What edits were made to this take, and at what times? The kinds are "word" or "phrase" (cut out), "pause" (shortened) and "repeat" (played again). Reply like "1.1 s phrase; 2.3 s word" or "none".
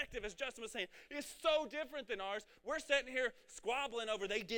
none

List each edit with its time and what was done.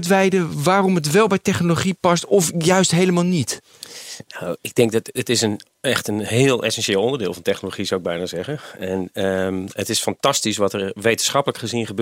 none

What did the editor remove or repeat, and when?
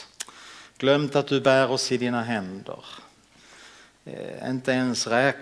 none

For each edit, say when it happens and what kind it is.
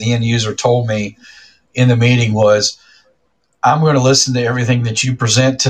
none

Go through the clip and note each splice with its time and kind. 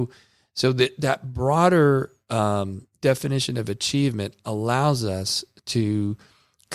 none

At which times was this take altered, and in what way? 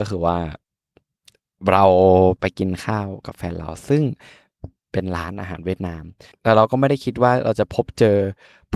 none

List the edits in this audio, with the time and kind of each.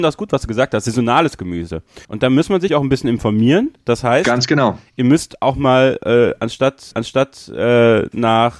2.0 s pause; 2.7 s word; 6.9 s repeat

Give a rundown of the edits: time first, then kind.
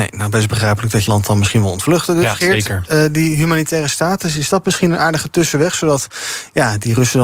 1.1 s word

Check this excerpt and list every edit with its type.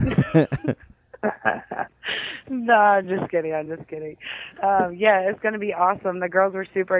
none

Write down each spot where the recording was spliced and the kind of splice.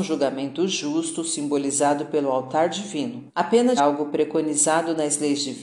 3.3 s pause; 3.8 s phrase

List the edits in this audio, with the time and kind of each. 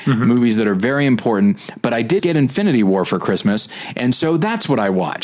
2.2 s word

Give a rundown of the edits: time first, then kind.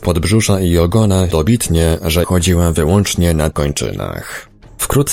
1.3 s word; 2.2 s word; 3.5 s word

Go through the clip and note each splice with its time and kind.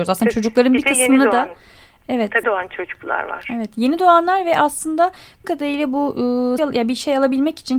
2.4 s word; 5.4 s word; 6.6 s word

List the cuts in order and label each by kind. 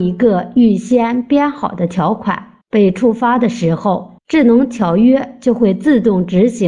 2.6 s pause; 4.2 s pause

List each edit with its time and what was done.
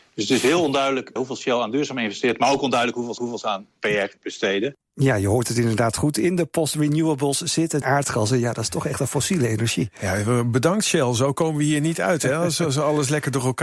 1.2 s word; 3.2 s repeat; 7.8 s phrase

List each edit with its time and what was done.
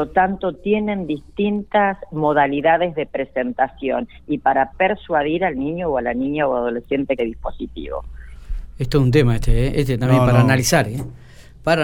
7.2 s phrase

